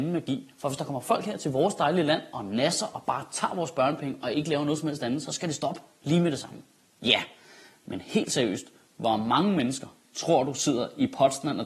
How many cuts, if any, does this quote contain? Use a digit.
0